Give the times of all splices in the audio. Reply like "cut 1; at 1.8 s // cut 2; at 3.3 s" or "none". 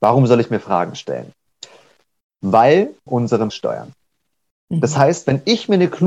cut 1; at 3.1 s // cut 2; at 3.5 s